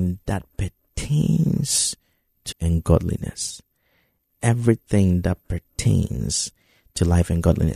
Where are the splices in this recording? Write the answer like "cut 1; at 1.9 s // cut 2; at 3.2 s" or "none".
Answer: cut 1; at 2.5 s